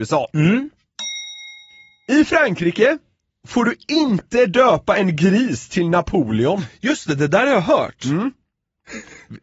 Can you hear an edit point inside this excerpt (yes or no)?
no